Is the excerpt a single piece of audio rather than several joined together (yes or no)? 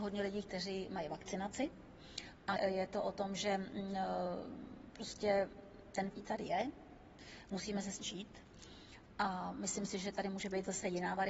no